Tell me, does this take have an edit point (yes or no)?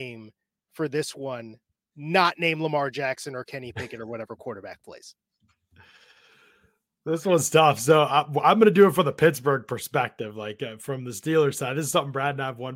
no